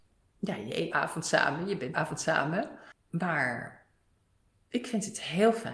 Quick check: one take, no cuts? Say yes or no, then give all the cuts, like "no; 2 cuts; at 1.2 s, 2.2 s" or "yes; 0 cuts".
no; 2 cuts; at 0.9 s, 1.9 s